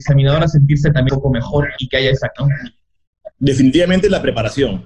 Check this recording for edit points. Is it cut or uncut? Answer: cut